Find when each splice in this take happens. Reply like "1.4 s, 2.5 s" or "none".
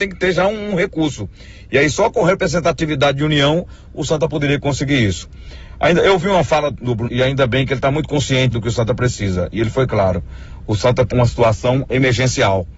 6.7 s, 7.1 s, 8.5 s, 11.1 s